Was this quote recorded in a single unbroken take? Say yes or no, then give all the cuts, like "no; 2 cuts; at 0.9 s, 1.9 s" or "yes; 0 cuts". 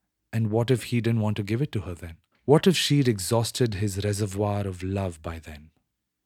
no; 1 cut; at 2.3 s